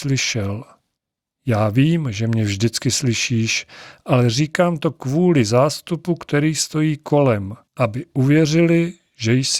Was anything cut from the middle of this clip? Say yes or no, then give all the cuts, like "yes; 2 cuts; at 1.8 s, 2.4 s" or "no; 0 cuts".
yes; 1 cut; at 7.7 s